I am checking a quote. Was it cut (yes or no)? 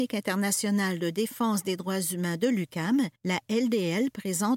yes